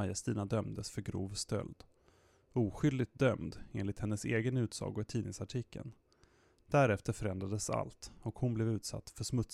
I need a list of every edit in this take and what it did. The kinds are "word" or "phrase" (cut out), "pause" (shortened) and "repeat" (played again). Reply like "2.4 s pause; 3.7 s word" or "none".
none